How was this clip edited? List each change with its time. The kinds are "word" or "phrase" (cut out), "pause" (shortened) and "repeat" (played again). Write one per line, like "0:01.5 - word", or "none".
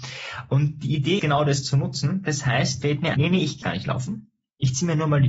0:01.2 - word
0:02.8 - word
0:03.1 - word
0:03.6 - word